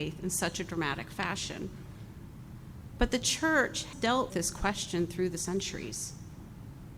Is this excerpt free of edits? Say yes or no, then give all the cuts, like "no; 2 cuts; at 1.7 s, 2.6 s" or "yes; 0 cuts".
no; 2 cuts; at 3.9 s, 4.3 s